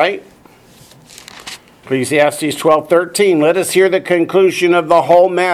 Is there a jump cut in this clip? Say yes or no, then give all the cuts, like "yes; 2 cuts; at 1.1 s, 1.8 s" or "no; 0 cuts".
no; 0 cuts